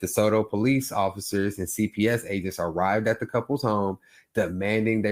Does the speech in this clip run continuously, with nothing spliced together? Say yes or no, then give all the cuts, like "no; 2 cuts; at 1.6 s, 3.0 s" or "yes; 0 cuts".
yes; 0 cuts